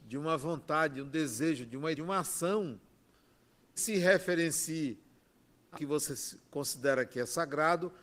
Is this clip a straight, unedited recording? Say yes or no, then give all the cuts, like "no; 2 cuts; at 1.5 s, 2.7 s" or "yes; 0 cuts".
no; 3 cuts; at 1.9 s, 3.8 s, 5.7 s